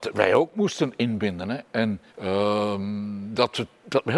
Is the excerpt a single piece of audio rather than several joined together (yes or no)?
no